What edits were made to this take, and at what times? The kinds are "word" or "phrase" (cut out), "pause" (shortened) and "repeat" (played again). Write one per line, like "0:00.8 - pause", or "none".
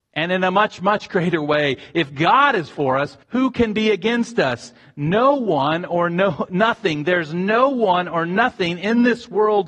0:03.2 - pause